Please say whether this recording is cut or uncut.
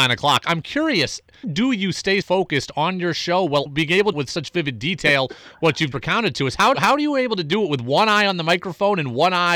cut